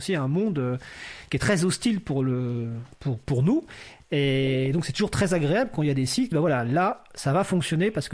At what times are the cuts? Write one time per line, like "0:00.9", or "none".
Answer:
0:06.3